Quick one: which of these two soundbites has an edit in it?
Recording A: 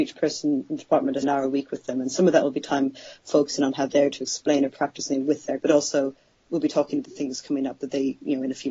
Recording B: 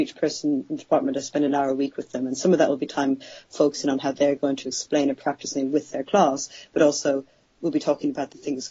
A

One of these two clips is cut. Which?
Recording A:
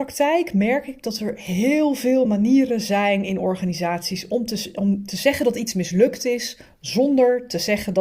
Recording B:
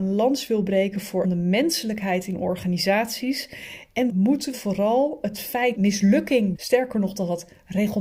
B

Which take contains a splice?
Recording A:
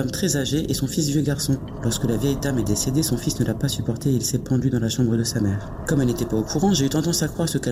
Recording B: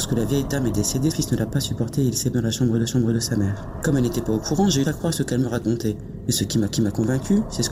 B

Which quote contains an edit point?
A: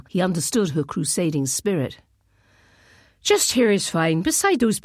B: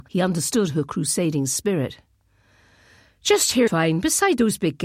B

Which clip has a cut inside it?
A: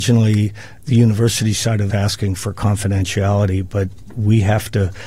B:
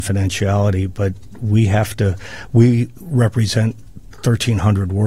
A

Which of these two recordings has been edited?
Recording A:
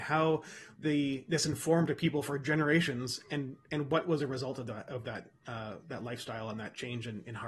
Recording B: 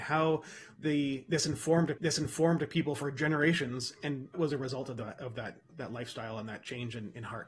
B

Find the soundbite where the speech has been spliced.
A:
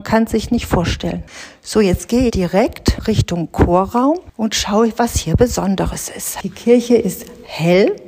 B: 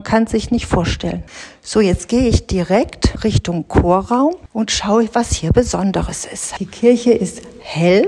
A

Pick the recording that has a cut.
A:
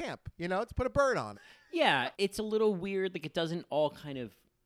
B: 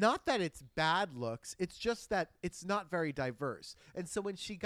A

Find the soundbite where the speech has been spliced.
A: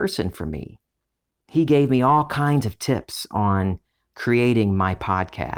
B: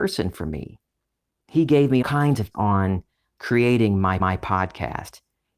B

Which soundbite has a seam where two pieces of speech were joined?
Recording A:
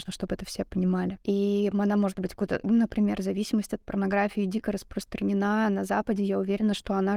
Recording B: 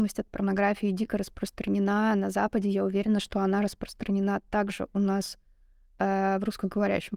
A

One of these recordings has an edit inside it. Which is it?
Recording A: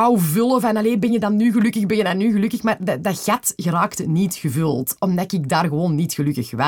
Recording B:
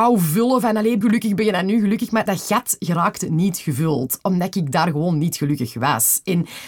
B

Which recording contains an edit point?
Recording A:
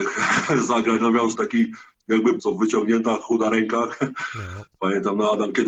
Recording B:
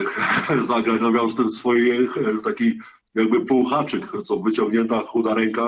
A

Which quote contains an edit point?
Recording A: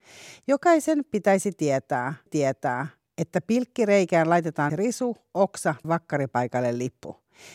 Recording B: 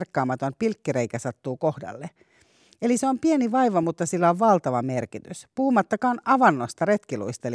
A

